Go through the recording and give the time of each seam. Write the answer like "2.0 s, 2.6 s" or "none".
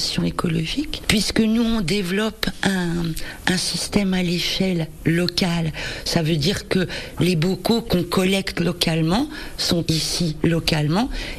9.9 s